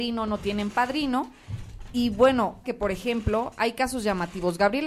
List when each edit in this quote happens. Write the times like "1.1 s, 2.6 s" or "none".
2.6 s